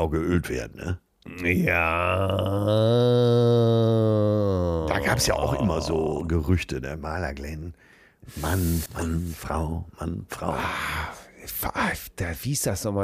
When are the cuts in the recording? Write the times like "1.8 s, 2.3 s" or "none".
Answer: 8.9 s